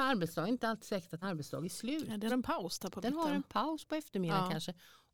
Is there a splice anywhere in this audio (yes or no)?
yes